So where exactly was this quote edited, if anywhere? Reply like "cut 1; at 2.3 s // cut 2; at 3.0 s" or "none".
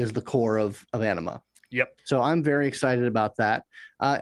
cut 1; at 2.0 s

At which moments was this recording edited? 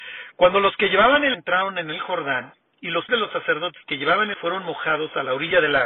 cut 1; at 1.3 s // cut 2; at 3.1 s // cut 3; at 4.3 s

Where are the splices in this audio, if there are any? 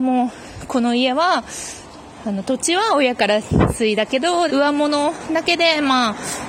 cut 1; at 4.5 s

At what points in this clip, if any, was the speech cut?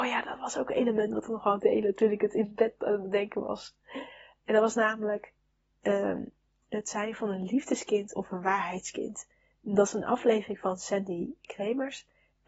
none

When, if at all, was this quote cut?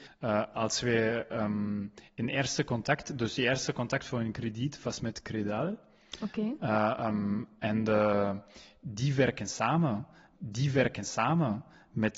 cut 1; at 10.3 s

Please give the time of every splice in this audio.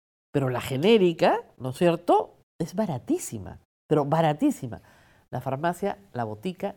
none

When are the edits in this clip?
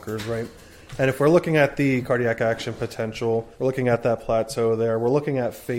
cut 1; at 3.5 s

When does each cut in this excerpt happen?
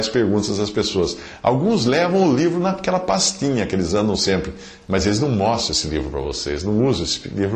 none

